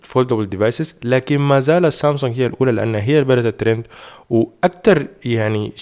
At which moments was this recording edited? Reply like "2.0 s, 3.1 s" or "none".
none